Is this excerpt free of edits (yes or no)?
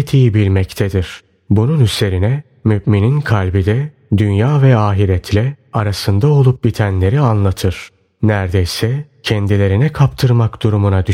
yes